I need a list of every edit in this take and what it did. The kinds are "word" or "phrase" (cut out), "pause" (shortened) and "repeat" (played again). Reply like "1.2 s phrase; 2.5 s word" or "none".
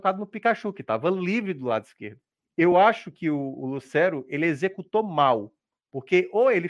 none